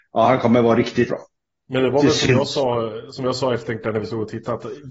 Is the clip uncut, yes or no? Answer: no